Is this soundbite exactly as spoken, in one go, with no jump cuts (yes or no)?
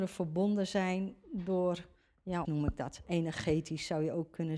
no